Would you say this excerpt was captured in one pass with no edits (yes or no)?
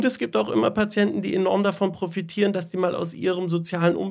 yes